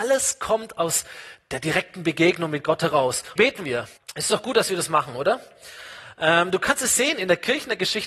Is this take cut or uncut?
cut